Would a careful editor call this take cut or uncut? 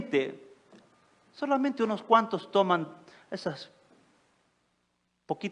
uncut